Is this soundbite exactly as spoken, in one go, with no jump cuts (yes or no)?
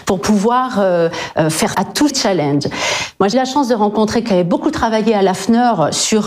no